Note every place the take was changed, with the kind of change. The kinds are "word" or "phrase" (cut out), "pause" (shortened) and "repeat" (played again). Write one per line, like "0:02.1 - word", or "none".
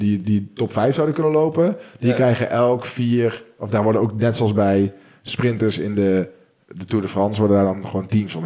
none